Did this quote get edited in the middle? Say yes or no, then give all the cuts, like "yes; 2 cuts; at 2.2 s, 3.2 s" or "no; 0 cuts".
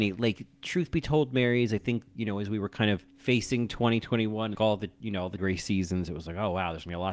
yes; 3 cuts; at 3.1 s, 4.5 s, 5.4 s